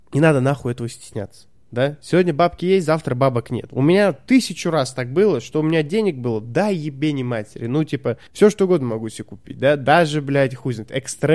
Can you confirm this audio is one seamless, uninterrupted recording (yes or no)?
no